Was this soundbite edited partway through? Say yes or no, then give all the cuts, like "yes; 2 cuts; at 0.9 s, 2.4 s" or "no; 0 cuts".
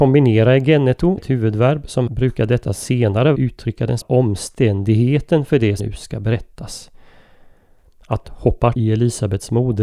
yes; 7 cuts; at 1.2 s, 2.1 s, 3.3 s, 4.0 s, 5.8 s, 8.2 s, 8.7 s